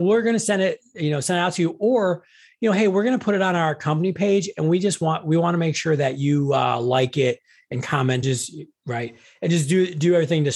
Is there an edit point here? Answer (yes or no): yes